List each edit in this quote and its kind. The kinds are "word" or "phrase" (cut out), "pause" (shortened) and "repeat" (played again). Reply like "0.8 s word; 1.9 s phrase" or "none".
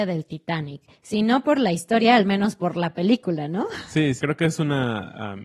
4.2 s word